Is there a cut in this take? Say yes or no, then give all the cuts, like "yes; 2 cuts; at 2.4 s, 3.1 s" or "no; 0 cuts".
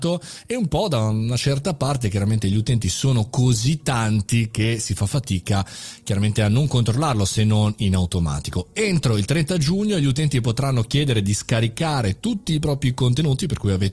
no; 0 cuts